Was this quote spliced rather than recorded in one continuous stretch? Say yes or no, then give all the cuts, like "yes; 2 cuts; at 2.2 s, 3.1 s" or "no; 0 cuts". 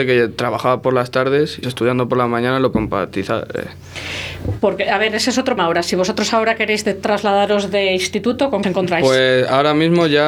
yes; 4 cuts; at 1.6 s, 2.7 s, 5.6 s, 8.6 s